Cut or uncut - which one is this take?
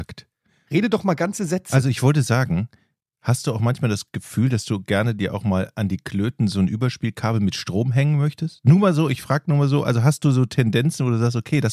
uncut